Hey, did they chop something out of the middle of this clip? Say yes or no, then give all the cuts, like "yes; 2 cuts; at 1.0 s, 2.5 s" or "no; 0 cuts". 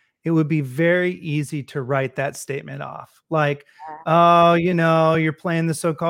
no; 0 cuts